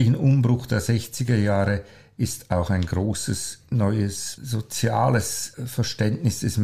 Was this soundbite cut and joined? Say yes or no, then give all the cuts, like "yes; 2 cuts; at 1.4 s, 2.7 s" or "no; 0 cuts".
no; 0 cuts